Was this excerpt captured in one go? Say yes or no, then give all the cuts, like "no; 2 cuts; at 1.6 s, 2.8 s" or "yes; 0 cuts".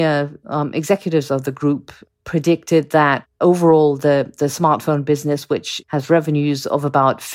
yes; 0 cuts